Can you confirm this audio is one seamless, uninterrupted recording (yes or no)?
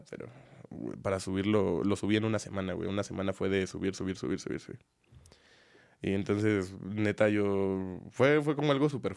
yes